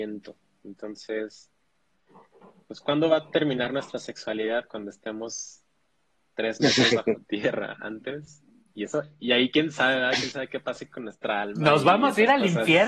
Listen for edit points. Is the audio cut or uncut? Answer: uncut